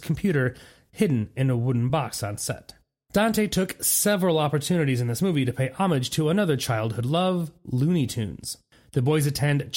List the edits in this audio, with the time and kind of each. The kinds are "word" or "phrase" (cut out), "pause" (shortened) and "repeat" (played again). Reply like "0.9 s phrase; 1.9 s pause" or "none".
none